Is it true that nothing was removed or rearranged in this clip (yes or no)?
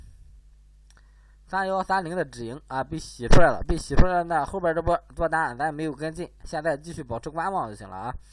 yes